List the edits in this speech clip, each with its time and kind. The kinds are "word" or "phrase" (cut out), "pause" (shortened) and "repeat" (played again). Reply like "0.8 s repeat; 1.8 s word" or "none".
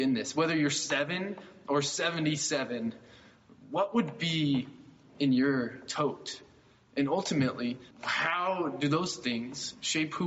7.9 s word

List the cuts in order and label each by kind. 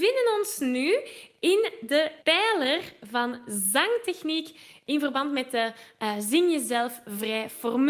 2.2 s pause

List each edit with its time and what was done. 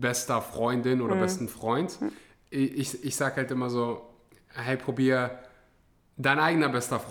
none

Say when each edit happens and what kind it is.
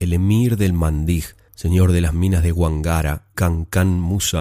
1.5 s pause; 3.3 s word

